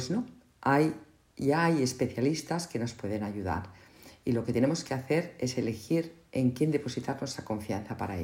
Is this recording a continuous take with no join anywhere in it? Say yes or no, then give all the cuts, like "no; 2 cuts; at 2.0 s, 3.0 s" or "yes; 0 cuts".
yes; 0 cuts